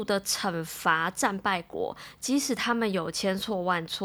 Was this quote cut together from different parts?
no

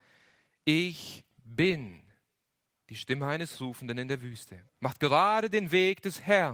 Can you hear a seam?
yes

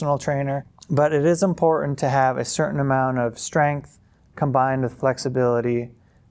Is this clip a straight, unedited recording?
yes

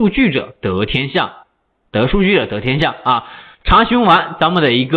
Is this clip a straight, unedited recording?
yes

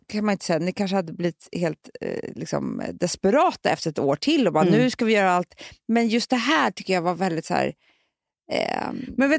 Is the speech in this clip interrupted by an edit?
no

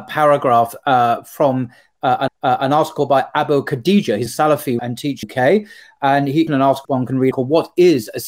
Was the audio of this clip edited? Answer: yes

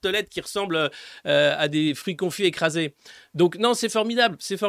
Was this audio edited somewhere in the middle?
no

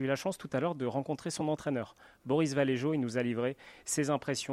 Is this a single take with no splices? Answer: yes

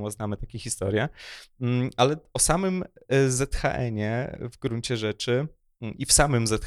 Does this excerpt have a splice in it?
no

